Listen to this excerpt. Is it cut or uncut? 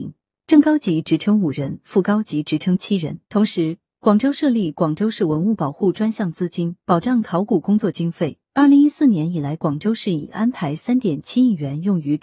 cut